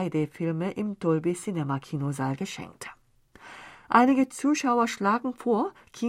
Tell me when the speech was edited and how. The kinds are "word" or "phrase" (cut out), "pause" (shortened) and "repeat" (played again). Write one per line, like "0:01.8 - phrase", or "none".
none